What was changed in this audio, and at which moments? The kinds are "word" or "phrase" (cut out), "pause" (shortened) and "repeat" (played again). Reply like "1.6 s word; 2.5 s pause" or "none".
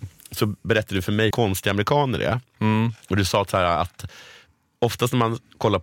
1.3 s word; 3.0 s pause